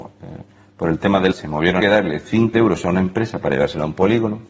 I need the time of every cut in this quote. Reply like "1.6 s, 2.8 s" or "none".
1.3 s, 1.8 s, 2.5 s